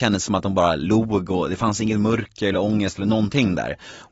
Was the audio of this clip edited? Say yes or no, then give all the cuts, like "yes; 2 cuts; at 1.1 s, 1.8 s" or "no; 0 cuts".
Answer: no; 0 cuts